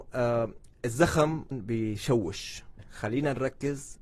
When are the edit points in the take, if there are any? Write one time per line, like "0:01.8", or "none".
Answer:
0:01.5
0:02.8